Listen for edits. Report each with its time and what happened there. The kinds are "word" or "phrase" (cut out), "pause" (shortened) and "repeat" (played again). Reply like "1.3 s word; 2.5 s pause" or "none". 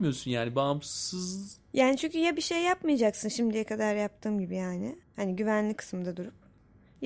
5.0 s pause